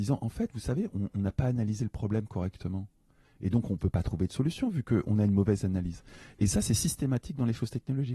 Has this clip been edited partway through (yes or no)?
no